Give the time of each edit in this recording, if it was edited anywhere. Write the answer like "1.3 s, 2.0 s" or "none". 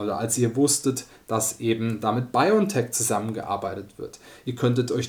none